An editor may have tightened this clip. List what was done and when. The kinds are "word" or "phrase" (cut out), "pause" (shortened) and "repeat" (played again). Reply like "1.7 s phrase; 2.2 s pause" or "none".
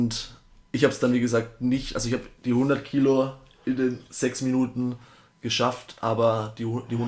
none